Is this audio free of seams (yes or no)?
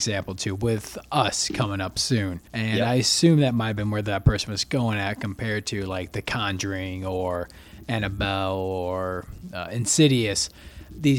no